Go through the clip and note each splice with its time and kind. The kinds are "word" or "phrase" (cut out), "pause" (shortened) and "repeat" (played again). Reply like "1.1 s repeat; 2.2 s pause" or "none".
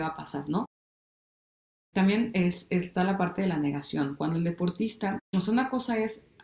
none